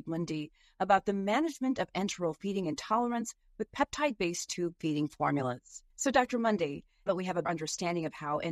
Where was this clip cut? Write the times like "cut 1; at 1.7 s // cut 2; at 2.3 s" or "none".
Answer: cut 1; at 5.9 s // cut 2; at 7.1 s // cut 3; at 7.4 s

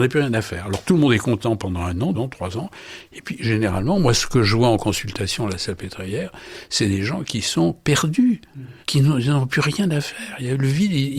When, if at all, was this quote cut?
cut 1; at 2.1 s // cut 2; at 8.8 s

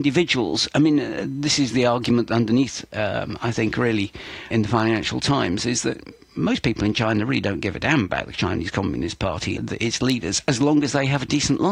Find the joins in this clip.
cut 1; at 4.5 s // cut 2; at 9.6 s

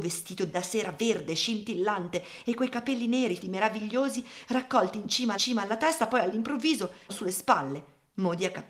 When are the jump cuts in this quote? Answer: cut 1; at 3.4 s // cut 2; at 5.4 s // cut 3; at 7.1 s

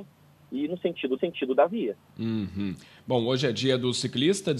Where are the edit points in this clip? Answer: cut 1; at 1.2 s // cut 2; at 2.1 s

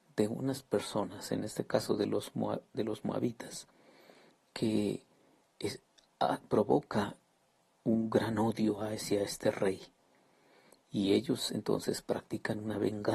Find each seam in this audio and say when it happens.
none

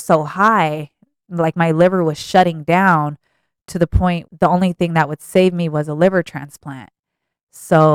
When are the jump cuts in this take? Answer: cut 1; at 4.2 s

